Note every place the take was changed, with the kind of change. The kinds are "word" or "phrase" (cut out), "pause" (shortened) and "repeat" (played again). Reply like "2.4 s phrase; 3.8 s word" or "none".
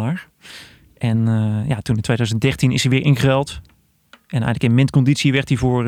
none